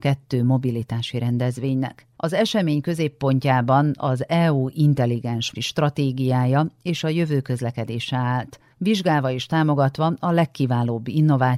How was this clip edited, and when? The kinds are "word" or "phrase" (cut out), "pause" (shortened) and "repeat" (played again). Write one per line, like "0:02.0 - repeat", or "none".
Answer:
0:02.1 - pause
0:05.5 - word
0:08.7 - pause